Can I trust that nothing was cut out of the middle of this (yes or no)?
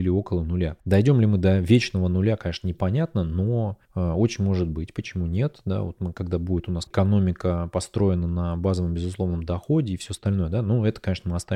no